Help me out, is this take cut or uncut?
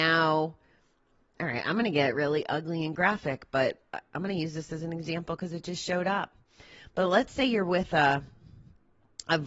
uncut